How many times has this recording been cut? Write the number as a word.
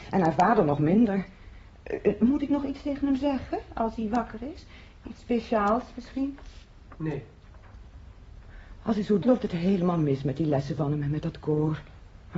one